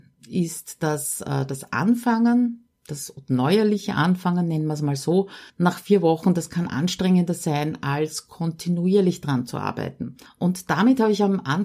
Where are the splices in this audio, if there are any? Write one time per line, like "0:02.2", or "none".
0:05.5
0:10.3